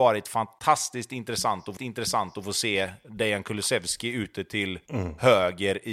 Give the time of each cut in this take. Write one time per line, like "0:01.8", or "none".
0:01.8